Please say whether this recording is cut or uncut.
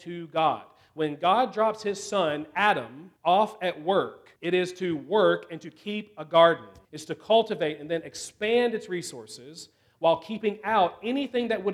cut